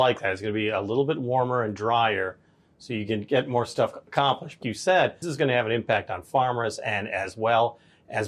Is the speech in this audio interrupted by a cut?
yes; 2 cuts; at 4.6 s, 5.2 s

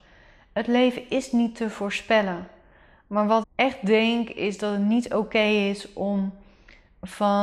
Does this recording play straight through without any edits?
no; 1 cut; at 3.4 s

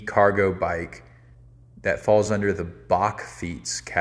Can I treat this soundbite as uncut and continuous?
yes; 0 cuts

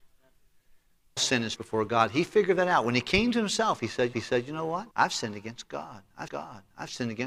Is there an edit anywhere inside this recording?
yes; 5 cuts; at 1.2 s, 1.6 s, 4.1 s, 4.9 s, 6.3 s

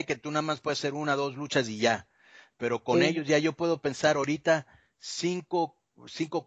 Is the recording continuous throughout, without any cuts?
yes; 0 cuts

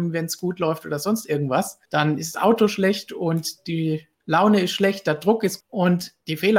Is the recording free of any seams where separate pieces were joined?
no; 4 cuts; at 1.9 s, 2.3 s, 4.1 s, 5.6 s

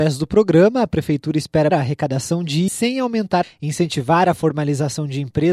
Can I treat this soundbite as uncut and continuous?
no; 3 cuts; at 1.7 s, 2.7 s, 3.4 s

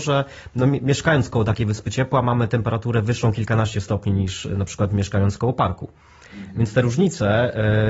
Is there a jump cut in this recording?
no; 0 cuts

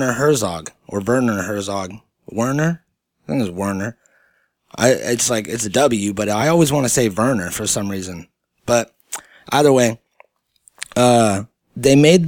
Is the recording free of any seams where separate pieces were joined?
yes; 0 cuts

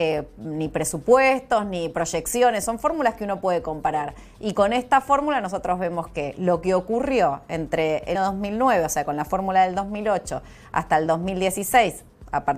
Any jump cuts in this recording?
yes; 1 cut; at 8.1 s

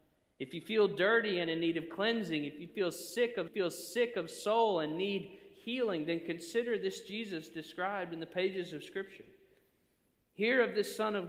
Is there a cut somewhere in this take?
yes; 1 cut; at 3.5 s

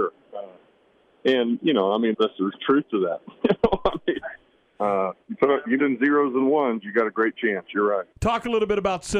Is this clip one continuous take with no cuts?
no; 5 cuts; at 2.1 s, 2.6 s, 5.2 s, 5.8 s, 8.1 s

